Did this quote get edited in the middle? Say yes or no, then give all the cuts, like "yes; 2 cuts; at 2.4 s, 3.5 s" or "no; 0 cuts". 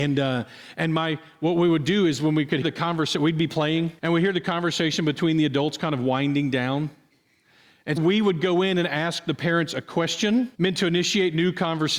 yes; 4 cuts; at 2.6 s, 4.0 s, 8.0 s, 10.5 s